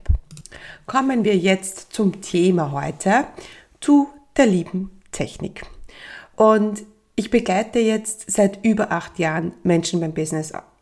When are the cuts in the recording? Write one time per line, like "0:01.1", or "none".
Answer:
none